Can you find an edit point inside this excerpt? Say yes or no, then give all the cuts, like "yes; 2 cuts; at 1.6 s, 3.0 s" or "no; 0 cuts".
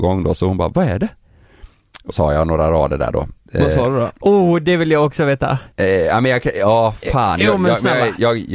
yes; 2 cuts; at 2.1 s, 5.7 s